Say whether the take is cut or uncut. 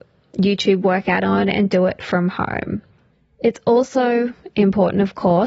cut